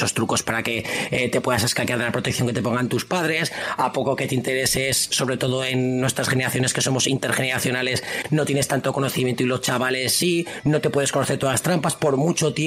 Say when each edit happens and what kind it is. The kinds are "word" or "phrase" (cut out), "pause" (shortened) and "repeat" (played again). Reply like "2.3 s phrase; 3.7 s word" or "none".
none